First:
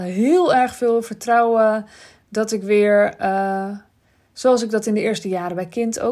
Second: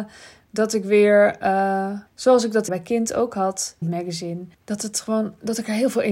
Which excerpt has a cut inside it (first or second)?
second